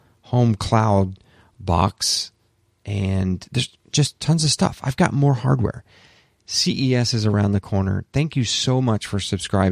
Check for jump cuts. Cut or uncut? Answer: uncut